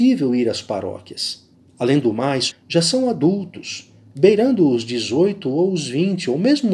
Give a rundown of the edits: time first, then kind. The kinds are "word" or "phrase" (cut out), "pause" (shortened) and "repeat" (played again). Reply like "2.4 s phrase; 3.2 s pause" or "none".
1.5 s pause; 2.5 s phrase

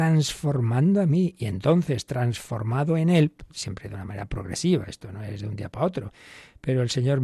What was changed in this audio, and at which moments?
none

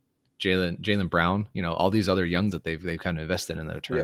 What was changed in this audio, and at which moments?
2.5 s word

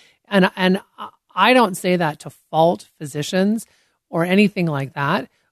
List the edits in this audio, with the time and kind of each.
none

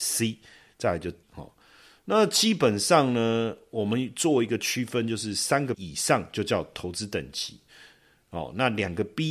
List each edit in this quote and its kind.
1.2 s word; 5.7 s word

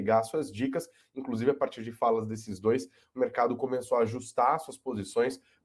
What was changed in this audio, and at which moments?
none

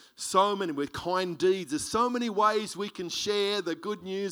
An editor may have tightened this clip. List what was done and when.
none

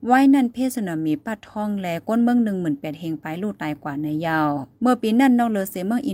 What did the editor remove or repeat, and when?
4.7 s pause

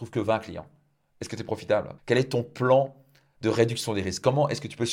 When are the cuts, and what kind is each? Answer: 2.0 s pause

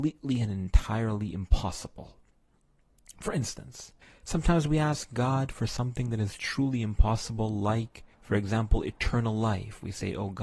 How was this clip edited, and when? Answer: 4.0 s pause; 8.1 s pause

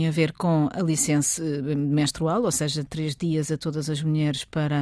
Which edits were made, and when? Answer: 1.4 s word; 2.9 s word

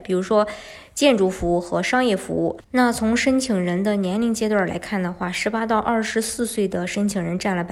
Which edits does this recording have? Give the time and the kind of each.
2.6 s pause

